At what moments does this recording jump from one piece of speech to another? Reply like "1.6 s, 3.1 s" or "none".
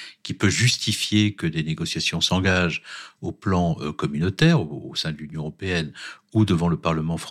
none

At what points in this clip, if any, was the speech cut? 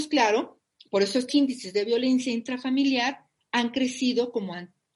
1.3 s

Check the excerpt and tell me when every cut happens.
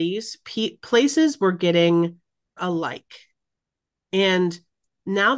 2.6 s

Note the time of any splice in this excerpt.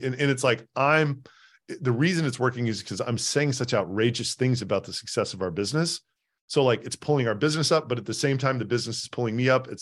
none

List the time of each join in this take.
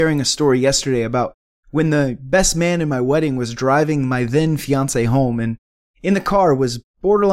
none

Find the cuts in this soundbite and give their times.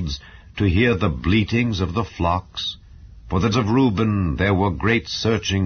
3.5 s

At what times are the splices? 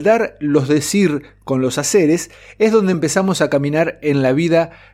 none

